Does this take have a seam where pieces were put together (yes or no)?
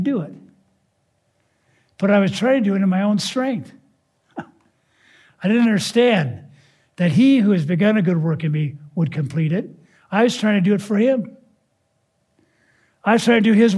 no